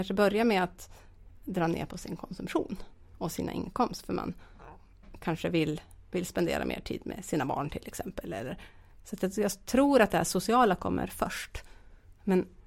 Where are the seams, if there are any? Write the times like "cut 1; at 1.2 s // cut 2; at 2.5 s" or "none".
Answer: none